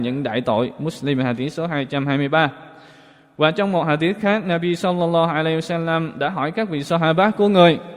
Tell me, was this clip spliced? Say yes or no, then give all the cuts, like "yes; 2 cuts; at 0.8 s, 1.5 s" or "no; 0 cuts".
no; 0 cuts